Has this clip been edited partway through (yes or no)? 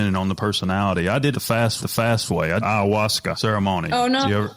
yes